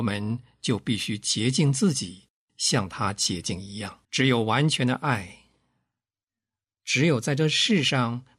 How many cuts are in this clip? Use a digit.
1